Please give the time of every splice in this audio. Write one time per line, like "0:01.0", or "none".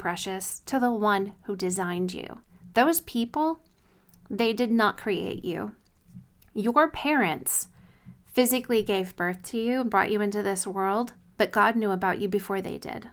none